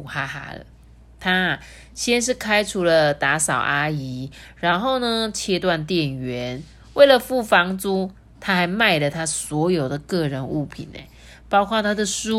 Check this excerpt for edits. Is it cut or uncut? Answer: uncut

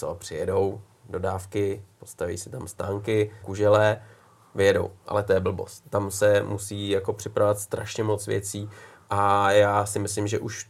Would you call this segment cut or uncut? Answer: cut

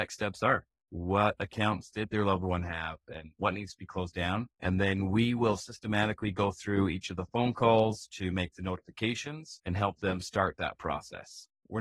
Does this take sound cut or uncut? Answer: cut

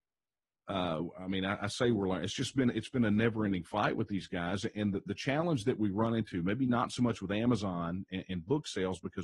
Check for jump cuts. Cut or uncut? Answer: uncut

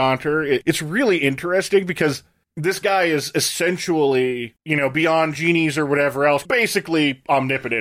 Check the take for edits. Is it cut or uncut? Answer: uncut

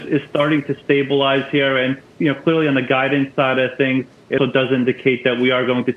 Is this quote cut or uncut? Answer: cut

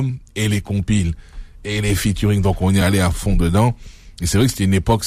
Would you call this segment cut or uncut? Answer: uncut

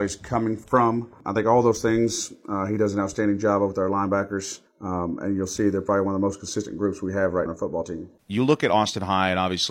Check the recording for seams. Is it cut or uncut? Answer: cut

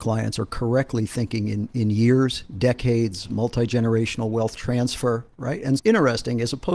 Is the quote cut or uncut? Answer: cut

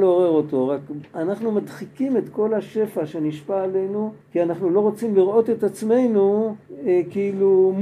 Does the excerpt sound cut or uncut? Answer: cut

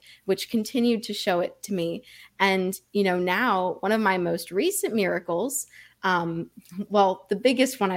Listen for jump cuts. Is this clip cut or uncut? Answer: uncut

